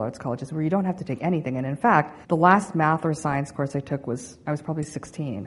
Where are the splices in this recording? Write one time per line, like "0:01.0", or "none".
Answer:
0:02.2